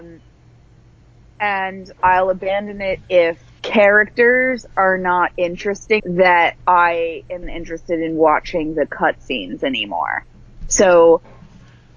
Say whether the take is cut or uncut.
cut